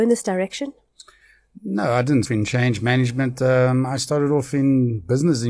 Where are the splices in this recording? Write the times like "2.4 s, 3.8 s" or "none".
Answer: 2.2 s